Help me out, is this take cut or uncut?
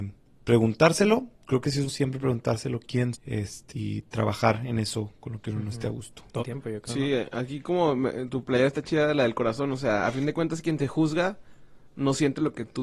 cut